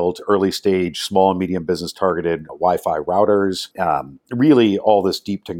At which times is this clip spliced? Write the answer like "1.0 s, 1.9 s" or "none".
2.5 s, 3.7 s